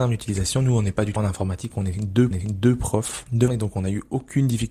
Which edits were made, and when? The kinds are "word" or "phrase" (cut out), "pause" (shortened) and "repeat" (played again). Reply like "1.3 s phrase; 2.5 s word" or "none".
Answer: 1.2 s phrase; 2.3 s repeat; 3.5 s word